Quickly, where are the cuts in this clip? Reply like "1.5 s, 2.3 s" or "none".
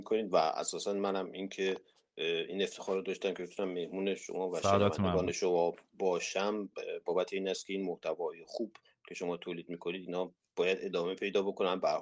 none